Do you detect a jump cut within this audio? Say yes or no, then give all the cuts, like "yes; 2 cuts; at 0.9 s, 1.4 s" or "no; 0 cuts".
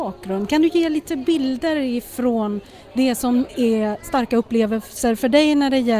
no; 0 cuts